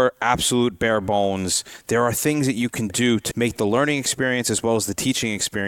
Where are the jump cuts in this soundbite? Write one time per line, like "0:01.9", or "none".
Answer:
0:03.3

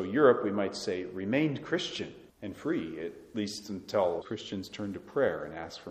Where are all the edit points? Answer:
0:02.3
0:04.2

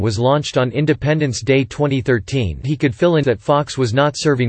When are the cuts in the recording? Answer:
0:02.6
0:03.2

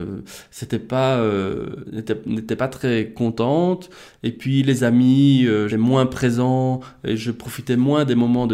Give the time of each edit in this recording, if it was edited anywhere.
0:05.7

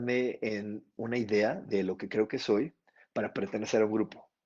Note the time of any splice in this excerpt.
none

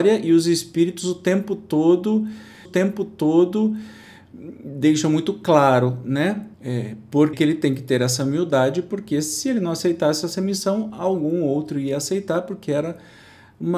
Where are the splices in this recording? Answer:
0:02.7
0:06.5
0:07.3

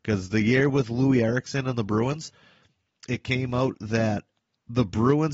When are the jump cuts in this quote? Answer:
none

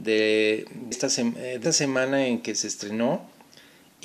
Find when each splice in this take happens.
0:00.9
0:01.6

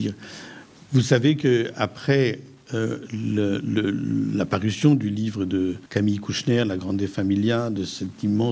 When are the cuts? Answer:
0:05.9

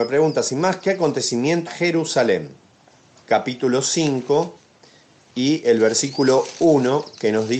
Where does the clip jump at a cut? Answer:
0:01.7
0:03.2

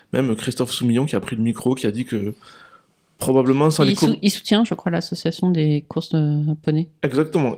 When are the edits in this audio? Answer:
none

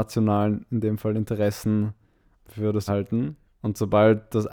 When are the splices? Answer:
0:02.4
0:02.9
0:03.5

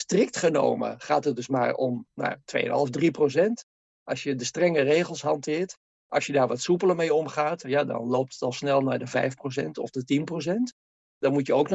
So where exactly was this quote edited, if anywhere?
0:02.1

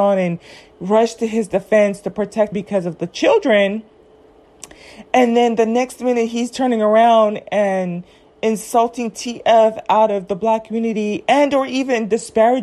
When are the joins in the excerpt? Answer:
0:02.5

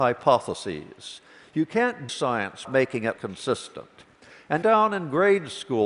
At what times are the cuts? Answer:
0:02.1
0:02.6
0:03.1
0:04.6

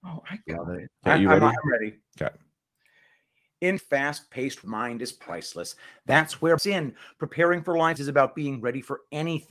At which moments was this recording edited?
0:01.0
0:02.1
0:03.8
0:04.6
0:06.6
0:08.0

